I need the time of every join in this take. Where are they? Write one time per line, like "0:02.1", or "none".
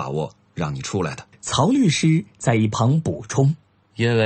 0:01.3